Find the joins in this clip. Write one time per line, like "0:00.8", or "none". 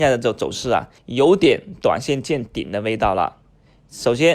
0:01.0